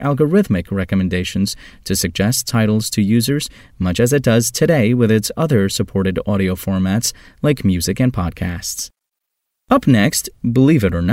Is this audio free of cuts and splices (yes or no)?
yes